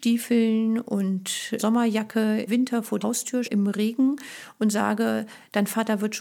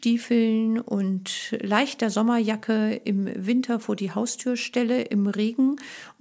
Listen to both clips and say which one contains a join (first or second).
first